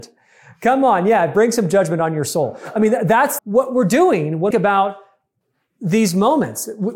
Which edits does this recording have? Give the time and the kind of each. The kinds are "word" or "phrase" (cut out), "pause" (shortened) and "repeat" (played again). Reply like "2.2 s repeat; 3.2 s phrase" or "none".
3.4 s word; 4.5 s phrase